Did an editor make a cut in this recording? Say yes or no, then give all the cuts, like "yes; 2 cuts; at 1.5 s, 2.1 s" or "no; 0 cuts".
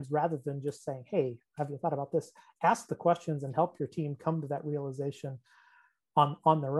no; 0 cuts